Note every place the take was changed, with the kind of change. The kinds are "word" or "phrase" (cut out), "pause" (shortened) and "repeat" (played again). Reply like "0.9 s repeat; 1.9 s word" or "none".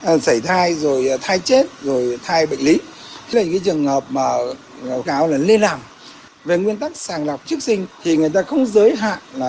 3.3 s word; 5.1 s word; 6.3 s word; 7.4 s word; 7.9 s pause